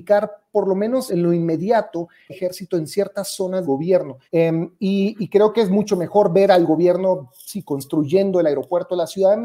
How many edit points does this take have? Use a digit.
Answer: 4